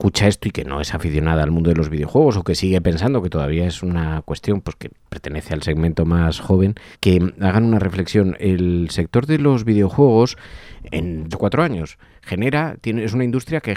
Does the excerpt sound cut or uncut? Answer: cut